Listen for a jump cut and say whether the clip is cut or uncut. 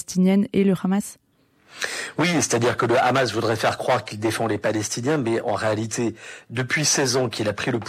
uncut